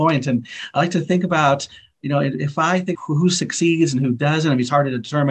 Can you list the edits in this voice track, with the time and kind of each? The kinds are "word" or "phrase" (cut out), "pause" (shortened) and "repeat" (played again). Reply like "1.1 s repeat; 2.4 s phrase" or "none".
2.9 s word